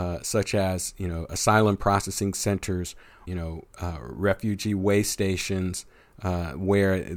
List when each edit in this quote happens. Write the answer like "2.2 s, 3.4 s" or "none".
3.3 s